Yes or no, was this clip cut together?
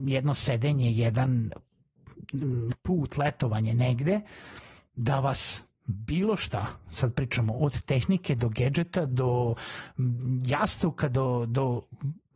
no